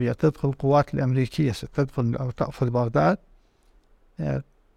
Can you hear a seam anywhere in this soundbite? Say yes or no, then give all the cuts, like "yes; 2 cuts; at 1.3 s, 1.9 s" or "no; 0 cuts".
no; 0 cuts